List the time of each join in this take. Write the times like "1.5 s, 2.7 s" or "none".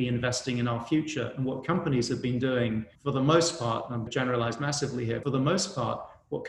2.9 s, 4.1 s, 5.2 s

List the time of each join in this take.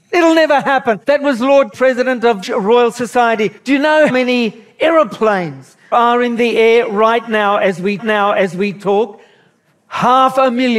1.0 s, 1.7 s, 2.4 s, 3.6 s, 4.1 s, 5.9 s, 8.0 s

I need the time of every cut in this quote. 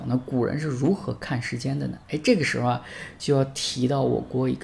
2.0 s

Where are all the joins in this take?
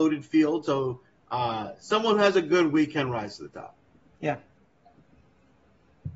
none

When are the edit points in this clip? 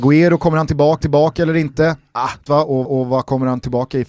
1.0 s, 2.5 s, 2.9 s

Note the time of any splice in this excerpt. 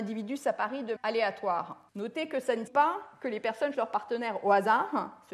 1.0 s, 1.9 s, 2.7 s, 3.7 s

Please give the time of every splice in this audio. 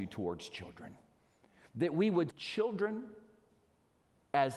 2.3 s

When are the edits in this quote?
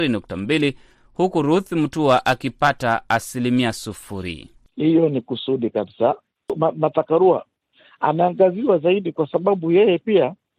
none

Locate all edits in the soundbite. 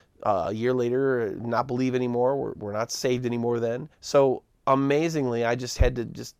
3.9 s

